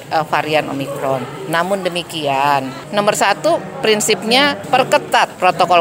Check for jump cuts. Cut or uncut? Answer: uncut